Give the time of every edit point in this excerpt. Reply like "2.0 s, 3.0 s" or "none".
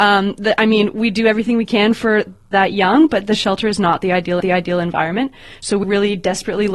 2.5 s, 4.4 s, 5.8 s